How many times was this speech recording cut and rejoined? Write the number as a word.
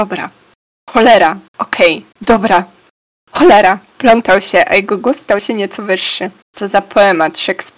three